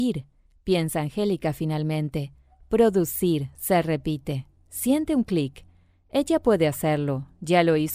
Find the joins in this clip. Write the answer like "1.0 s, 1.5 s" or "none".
none